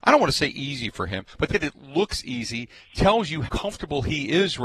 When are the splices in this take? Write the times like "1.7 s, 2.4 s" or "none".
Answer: 1.5 s, 3.5 s